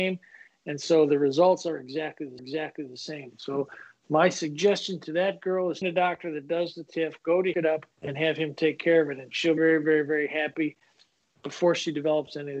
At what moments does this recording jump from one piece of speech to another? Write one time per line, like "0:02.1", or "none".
0:02.4
0:05.8
0:07.5
0:07.9
0:09.6